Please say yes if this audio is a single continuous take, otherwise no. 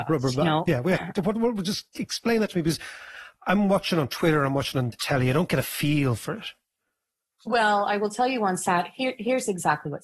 yes